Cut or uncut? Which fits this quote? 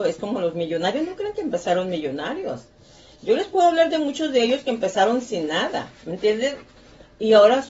uncut